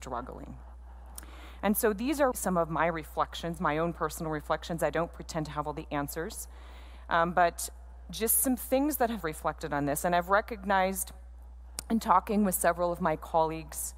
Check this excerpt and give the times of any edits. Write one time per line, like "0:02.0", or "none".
0:02.3
0:09.2

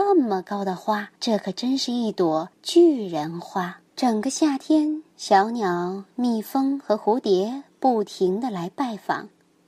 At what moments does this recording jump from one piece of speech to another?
0:01.2
0:02.5
0:03.9
0:05.1

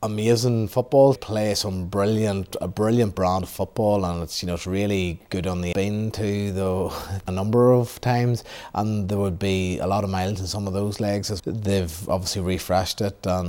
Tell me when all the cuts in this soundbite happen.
0:01.2
0:05.7
0:07.3
0:11.4

